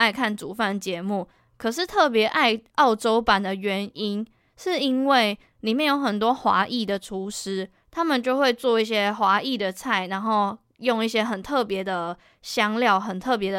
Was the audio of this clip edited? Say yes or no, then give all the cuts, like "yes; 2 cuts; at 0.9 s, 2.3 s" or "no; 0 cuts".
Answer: no; 0 cuts